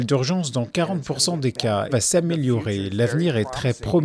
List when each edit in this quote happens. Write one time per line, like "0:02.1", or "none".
0:01.9